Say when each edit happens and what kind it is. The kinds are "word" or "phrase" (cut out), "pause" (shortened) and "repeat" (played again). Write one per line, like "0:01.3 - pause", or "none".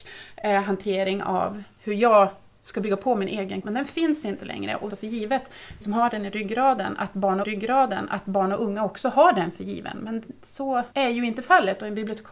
0:03.6 - word
0:04.9 - phrase
0:05.8 - word
0:07.4 - repeat
0:10.9 - pause